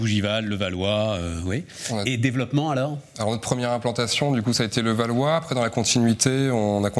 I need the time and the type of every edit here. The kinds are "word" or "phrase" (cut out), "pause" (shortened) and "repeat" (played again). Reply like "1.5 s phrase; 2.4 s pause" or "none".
2.1 s word